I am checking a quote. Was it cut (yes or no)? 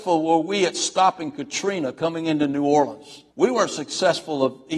yes